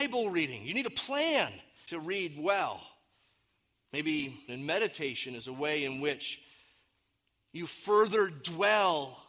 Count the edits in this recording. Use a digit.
2